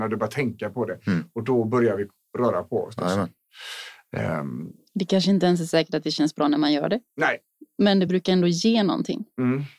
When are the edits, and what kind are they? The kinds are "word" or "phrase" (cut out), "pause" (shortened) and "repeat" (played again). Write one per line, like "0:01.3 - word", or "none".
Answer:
none